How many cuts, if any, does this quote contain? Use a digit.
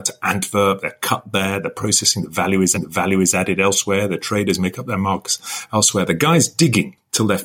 1